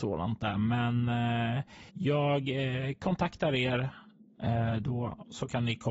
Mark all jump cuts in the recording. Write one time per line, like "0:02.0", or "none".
0:01.9